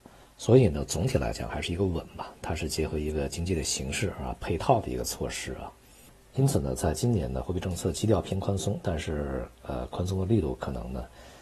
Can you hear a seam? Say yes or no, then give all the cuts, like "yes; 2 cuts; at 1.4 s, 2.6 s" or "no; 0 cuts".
no; 0 cuts